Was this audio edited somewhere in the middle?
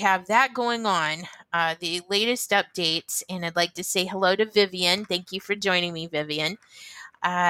no; 0 cuts

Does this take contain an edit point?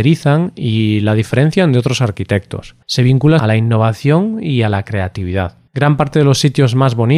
yes; 3 cuts; at 2.8 s, 3.4 s, 5.7 s

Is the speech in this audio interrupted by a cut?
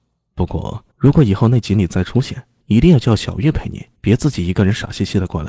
yes; 3 cuts; at 0.9 s, 2.6 s, 4.0 s

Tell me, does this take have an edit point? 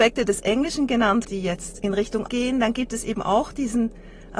yes; 3 cuts; at 1.2 s, 1.8 s, 2.3 s

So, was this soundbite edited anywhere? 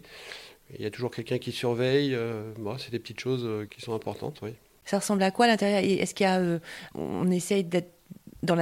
no; 0 cuts

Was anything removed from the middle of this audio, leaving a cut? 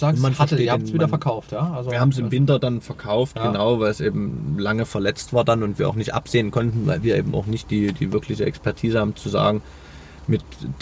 no; 0 cuts

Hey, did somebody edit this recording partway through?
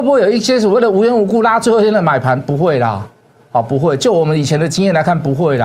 yes; 1 cut; at 3.2 s

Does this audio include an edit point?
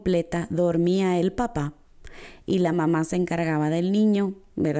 no; 0 cuts

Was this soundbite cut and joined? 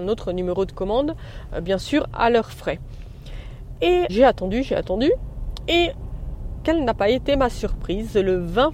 yes; 1 cut; at 4.1 s

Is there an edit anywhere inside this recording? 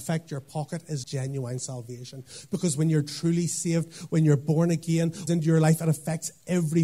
yes; 2 cuts; at 1.0 s, 5.3 s

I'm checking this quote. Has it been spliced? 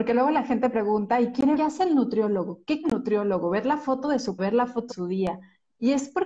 yes; 4 cuts; at 1.6 s, 2.8 s, 4.4 s, 4.9 s

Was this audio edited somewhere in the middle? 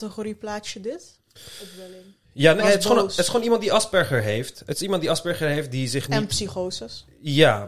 yes; 2 cuts; at 2.2 s, 2.6 s

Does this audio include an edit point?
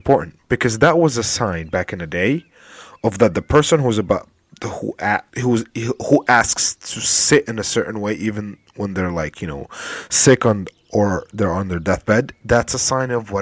yes; 1 cut; at 5.3 s

